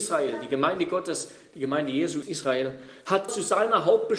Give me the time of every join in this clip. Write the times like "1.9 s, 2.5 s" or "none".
2.2 s, 3.3 s